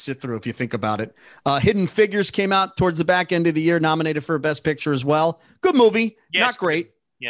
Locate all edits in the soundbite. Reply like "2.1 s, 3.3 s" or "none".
none

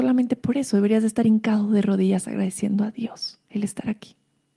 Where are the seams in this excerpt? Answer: 3.4 s

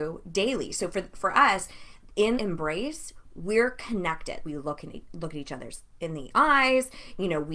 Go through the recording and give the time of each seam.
2.3 s, 4.4 s

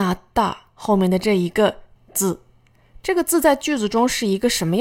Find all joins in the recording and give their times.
2.0 s

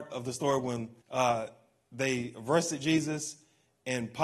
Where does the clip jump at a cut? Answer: 1.0 s

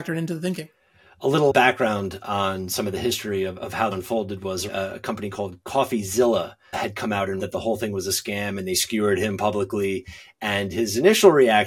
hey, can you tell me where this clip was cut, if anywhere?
1.5 s, 3.9 s, 4.7 s, 6.7 s, 7.4 s

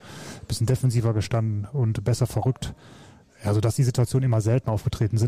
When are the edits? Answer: none

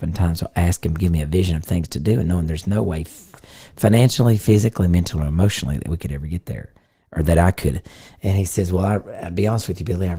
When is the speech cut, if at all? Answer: none

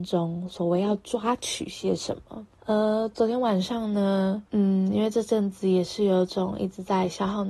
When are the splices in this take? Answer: 2.5 s, 4.5 s

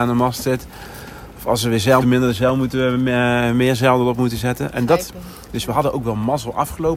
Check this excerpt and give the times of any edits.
2.0 s

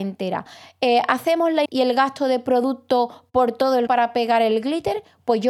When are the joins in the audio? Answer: 1.6 s, 3.9 s

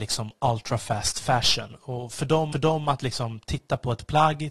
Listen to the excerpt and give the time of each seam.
2.5 s

